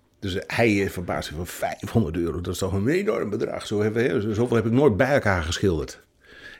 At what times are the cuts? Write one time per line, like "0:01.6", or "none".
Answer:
none